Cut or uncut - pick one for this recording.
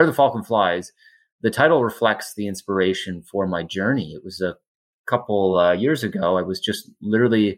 uncut